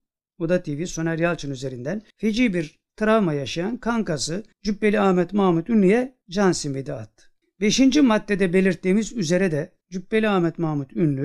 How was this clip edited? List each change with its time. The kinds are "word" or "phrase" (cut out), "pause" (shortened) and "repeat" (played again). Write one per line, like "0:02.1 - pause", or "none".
0:02.1 - pause
0:04.5 - pause
0:06.2 - pause
0:07.4 - pause
0:09.8 - pause